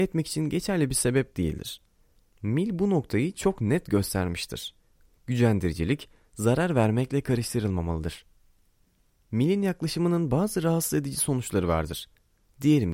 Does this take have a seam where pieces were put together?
no; 0 cuts

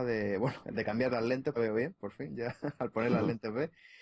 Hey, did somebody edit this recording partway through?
yes; 1 cut; at 1.6 s

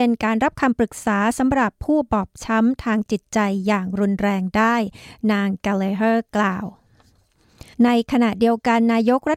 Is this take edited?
yes; 1 cut; at 7.7 s

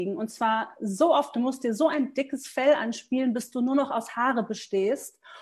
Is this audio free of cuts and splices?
yes; 0 cuts

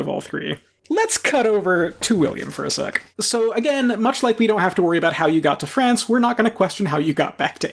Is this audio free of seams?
no; 1 cut; at 3.1 s

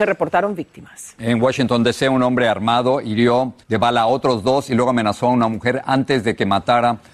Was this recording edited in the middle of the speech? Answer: yes; 1 cut; at 3.6 s

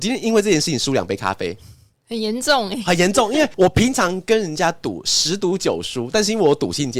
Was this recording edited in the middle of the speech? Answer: no; 0 cuts

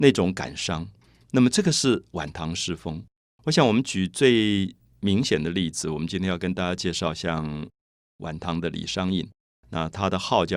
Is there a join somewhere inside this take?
no; 0 cuts

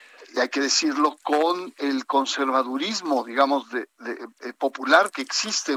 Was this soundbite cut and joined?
no; 0 cuts

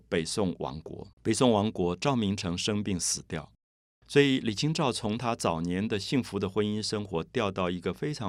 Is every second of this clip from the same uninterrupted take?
no; 1 cut; at 1.1 s

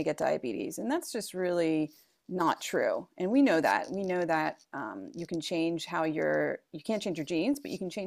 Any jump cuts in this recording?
no; 0 cuts

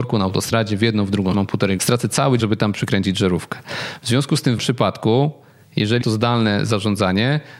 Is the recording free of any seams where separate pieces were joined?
no; 6 cuts; at 1.3 s, 1.8 s, 2.4 s, 2.7 s, 4.6 s, 6.0 s

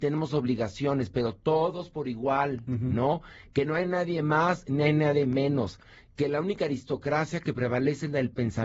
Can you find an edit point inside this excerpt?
no; 0 cuts

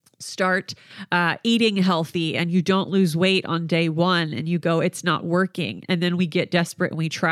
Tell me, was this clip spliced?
no; 0 cuts

